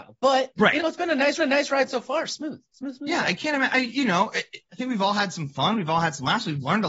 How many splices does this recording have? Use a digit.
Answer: 2